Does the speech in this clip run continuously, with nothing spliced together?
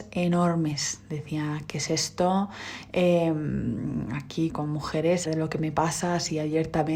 no; 2 cuts; at 4.5 s, 5.2 s

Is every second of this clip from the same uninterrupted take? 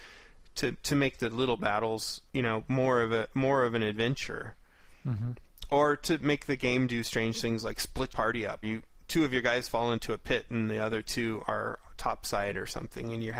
no; 3 cuts; at 2.3 s, 8.1 s, 8.6 s

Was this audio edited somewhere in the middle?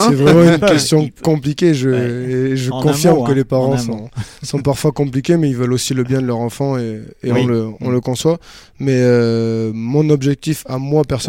no; 0 cuts

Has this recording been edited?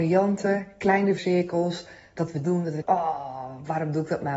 yes; 3 cuts; at 1.2 s, 2.4 s, 2.8 s

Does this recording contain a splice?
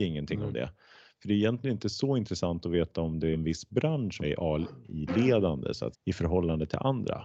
yes; 3 cuts; at 3.3 s, 4.2 s, 5.9 s

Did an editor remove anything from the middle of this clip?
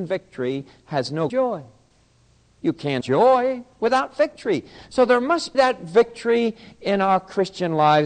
yes; 3 cuts; at 1.3 s, 3.0 s, 5.5 s

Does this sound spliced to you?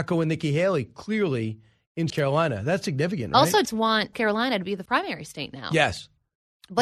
yes; 4 cuts; at 2.1 s, 3.6 s, 4.1 s, 4.9 s

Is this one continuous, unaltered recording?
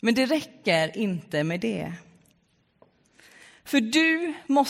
yes; 0 cuts

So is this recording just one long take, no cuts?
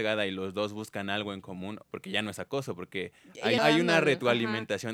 no; 2 cuts; at 1.8 s, 3.6 s

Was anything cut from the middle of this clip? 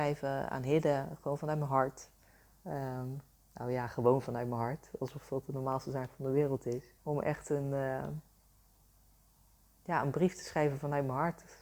yes; 1 cut; at 7.0 s

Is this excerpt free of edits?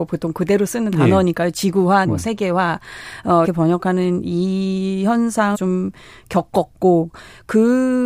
no; 3 cuts; at 2.0 s, 3.4 s, 5.5 s

